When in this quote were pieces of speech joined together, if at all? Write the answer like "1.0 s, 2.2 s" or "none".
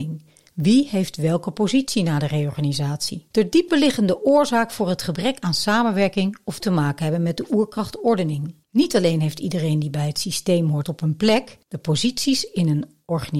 3.3 s, 6.6 s, 8.6 s, 10.8 s, 11.6 s